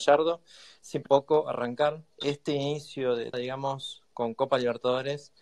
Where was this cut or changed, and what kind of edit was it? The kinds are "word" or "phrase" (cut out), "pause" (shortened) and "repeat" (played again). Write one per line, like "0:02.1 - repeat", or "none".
0:01.1 - phrase
0:02.1 - pause
0:03.3 - word